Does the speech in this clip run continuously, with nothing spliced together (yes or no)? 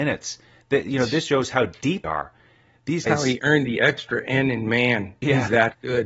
no